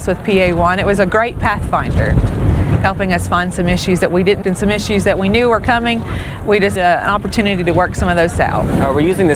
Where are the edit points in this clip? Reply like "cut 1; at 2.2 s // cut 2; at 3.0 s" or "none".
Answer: cut 1; at 4.4 s // cut 2; at 6.8 s // cut 3; at 8.3 s

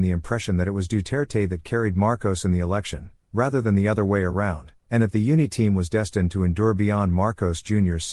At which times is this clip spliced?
none

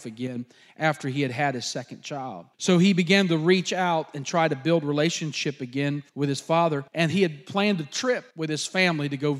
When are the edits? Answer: cut 1; at 2.5 s // cut 2; at 6.1 s // cut 3; at 6.9 s // cut 4; at 8.3 s

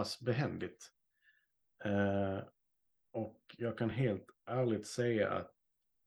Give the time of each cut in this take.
none

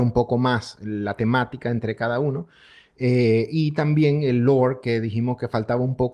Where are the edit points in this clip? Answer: none

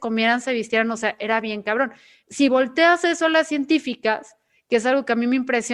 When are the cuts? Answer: none

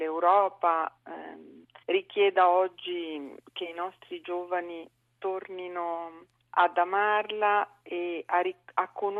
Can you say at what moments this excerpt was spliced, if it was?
cut 1; at 1.8 s // cut 2; at 6.3 s

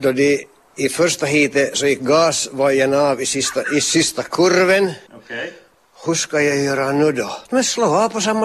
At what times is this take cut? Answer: cut 1; at 5.1 s // cut 2; at 7.5 s

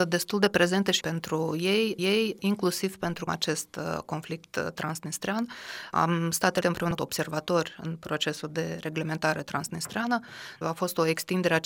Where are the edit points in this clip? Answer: cut 1; at 1.0 s // cut 2; at 2.0 s // cut 3; at 3.3 s // cut 4; at 6.6 s // cut 5; at 7.0 s // cut 6; at 10.6 s

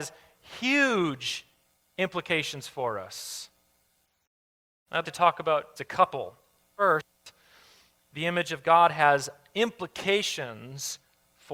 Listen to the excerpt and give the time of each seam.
cut 1; at 5.0 s // cut 2; at 5.8 s

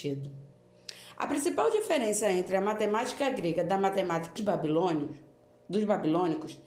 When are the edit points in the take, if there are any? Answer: cut 1; at 4.4 s

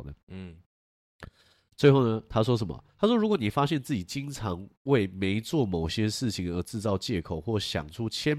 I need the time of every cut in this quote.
cut 1; at 2.9 s

